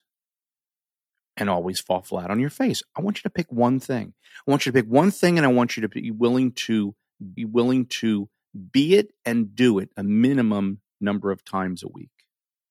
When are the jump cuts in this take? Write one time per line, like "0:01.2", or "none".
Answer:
0:07.4